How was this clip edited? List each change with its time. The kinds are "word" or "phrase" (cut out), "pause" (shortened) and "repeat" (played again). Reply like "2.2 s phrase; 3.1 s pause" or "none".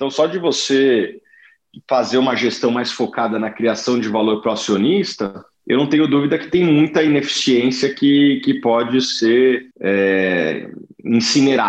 5.5 s pause; 9.7 s pause

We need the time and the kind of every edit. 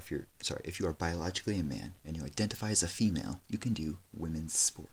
2.0 s pause; 3.4 s pause

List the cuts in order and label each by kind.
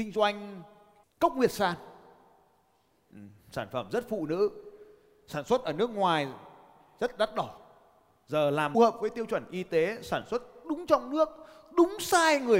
8.7 s phrase

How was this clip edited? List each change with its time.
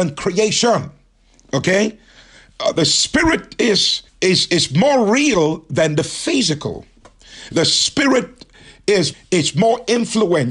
4.1 s pause; 9.1 s phrase

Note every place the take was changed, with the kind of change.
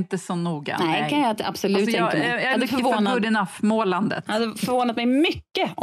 none

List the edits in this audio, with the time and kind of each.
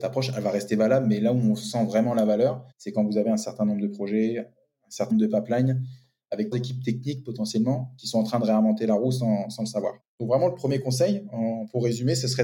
2.7 s pause; 5.1 s word; 6.5 s word

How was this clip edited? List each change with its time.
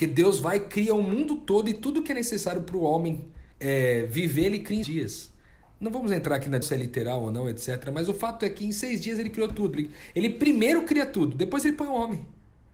3.5 s pause; 4.8 s word; 6.6 s word

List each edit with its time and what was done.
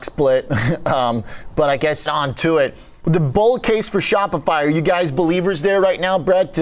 2.1 s phrase

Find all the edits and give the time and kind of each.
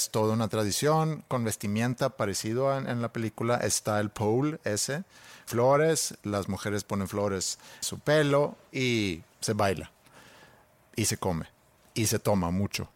5.5 s word; 7.8 s word; 9.3 s pause

